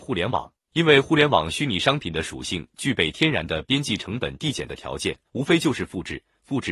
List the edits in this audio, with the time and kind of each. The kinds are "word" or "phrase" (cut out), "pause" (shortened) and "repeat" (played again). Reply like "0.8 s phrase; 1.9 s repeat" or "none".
5.3 s pause